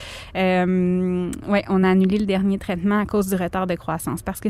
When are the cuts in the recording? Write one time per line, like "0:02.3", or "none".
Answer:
none